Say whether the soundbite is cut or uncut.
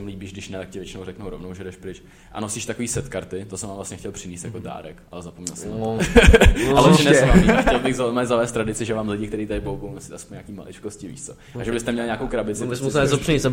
uncut